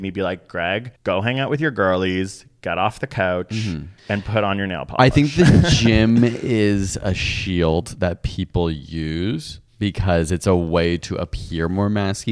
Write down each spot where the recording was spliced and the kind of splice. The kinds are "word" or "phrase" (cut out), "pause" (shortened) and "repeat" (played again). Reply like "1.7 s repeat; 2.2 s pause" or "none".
1.0 s pause; 4.0 s pause; 9.7 s pause